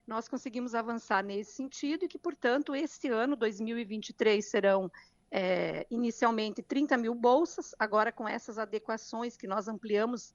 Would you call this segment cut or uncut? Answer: uncut